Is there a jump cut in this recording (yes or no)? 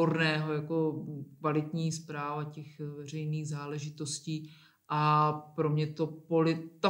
no